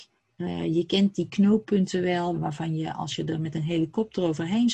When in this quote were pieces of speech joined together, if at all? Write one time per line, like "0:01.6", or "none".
0:02.3